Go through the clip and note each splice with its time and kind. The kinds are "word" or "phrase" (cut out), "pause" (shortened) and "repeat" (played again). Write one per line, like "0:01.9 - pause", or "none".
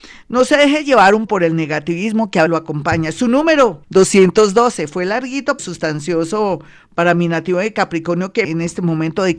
0:01.3 - word
0:02.5 - word
0:03.8 - pause
0:05.6 - word
0:08.4 - word